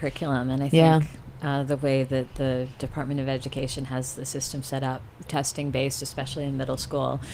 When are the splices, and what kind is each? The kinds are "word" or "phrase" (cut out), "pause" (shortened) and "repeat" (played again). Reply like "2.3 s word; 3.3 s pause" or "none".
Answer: 5.3 s word